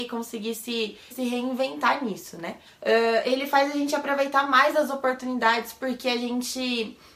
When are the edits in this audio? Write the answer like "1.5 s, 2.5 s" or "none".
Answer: 1.1 s, 2.7 s